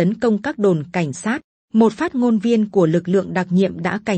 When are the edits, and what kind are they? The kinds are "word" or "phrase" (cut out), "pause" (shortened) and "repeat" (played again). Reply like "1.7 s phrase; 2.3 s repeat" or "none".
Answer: none

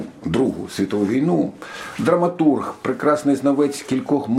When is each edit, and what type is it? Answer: none

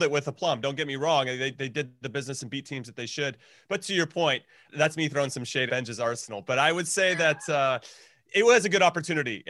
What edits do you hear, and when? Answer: 1.5 s word; 4.7 s word; 5.7 s word

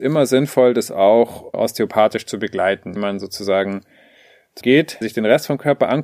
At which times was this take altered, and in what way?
1.5 s word; 3.0 s word; 4.6 s word; 5.0 s word

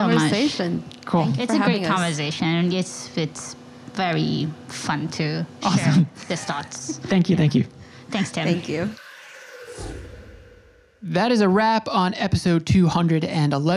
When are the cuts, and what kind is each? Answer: none

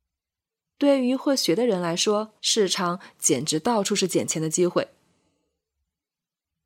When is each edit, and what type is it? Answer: 2.4 s pause

